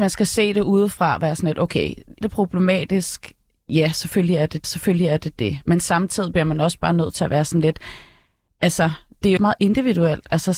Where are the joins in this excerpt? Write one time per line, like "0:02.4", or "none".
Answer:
0:02.2
0:04.6
0:09.4